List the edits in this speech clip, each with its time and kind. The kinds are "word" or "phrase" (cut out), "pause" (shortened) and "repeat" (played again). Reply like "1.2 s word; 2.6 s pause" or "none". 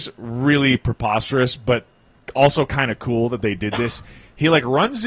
none